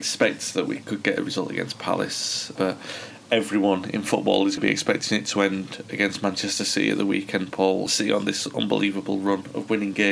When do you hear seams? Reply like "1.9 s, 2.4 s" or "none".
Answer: 2.6 s, 4.6 s, 7.9 s